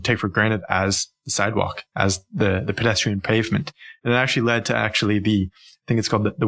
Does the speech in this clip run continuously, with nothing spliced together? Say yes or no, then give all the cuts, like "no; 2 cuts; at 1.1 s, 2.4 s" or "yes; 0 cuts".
yes; 0 cuts